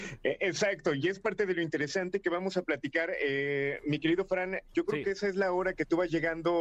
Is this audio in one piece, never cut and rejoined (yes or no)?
yes